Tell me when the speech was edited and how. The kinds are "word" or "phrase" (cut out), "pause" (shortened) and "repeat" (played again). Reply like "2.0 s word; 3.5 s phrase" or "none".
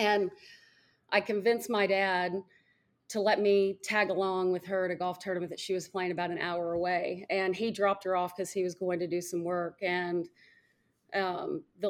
none